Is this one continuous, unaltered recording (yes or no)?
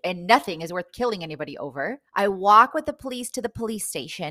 no